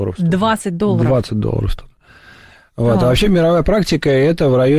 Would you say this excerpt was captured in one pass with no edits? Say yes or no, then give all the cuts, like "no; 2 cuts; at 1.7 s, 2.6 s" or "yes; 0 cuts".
yes; 0 cuts